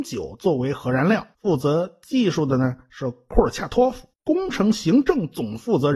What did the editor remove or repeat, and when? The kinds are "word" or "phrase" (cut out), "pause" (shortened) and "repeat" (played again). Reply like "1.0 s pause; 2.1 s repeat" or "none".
1.3 s pause; 4.1 s pause

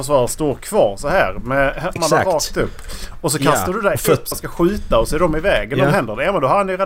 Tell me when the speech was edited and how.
2.0 s word; 4.3 s word

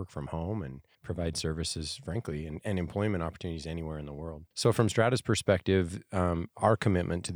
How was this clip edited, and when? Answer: 0.9 s pause; 4.5 s pause

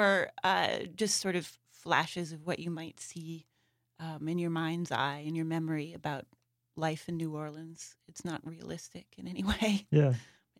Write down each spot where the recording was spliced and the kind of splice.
none

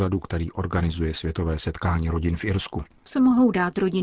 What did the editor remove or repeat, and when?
none

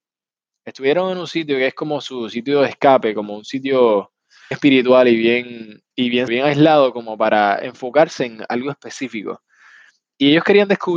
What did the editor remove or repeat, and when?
4.5 s word; 5.9 s pause; 6.3 s word

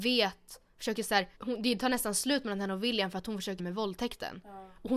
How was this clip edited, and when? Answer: 1.4 s pause; 3.6 s phrase

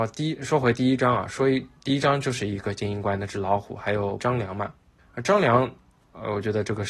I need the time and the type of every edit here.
1.8 s pause; 4.2 s word; 5.0 s pause

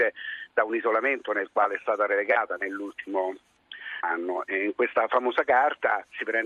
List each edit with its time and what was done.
4.0 s word

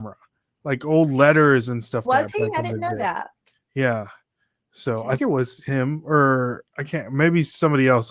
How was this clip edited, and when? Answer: 2.0 s word; 5.2 s word

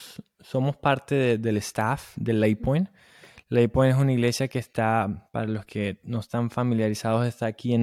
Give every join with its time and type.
none

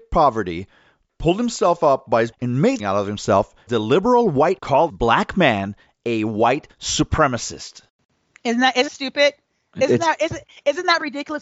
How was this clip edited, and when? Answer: 2.3 s word; 2.8 s word; 3.7 s word; 4.6 s word; 4.9 s word; 8.9 s word

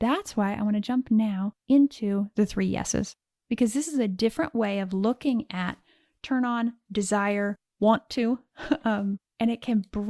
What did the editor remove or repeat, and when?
none

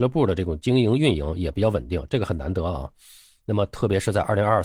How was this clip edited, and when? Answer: none

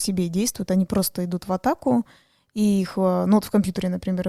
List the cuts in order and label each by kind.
none

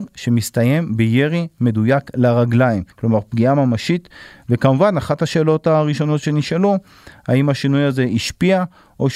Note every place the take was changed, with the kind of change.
2.9 s pause

